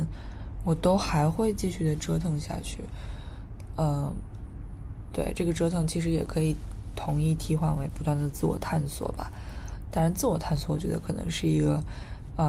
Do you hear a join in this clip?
no; 0 cuts

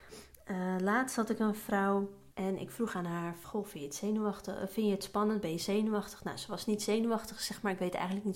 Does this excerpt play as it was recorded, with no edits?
no; 2 cuts; at 2.3 s, 3.4 s

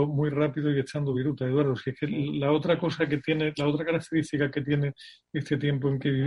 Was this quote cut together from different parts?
no; 0 cuts

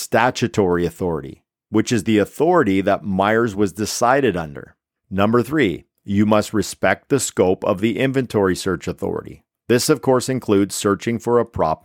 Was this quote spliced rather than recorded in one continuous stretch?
no; 0 cuts

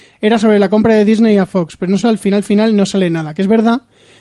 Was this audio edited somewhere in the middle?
yes; 1 cut; at 2.0 s

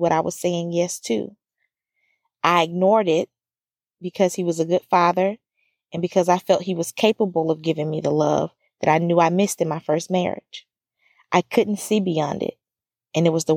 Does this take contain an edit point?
no; 0 cuts

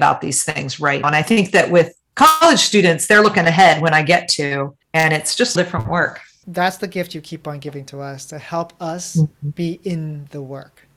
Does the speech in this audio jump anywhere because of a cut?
yes; 4 cuts; at 1.0 s, 4.8 s, 5.6 s, 6.4 s

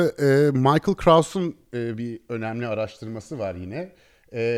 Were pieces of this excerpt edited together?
no; 0 cuts

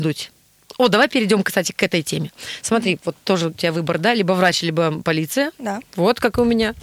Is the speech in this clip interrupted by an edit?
no; 0 cuts

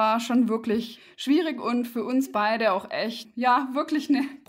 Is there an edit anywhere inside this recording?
no; 0 cuts

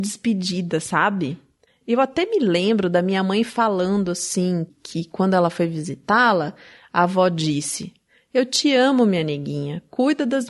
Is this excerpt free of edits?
yes; 0 cuts

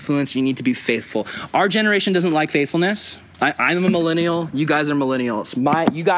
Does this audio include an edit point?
no; 0 cuts

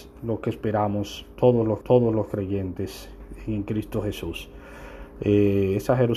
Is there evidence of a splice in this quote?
yes; 1 cut; at 1.8 s

